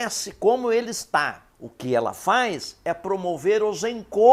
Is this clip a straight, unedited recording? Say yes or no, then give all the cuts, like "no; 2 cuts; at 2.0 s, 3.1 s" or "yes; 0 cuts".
no; 1 cut; at 1.5 s